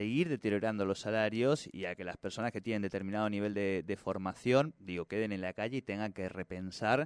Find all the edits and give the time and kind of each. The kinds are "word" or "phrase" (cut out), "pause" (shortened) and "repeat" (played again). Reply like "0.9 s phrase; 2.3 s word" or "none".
none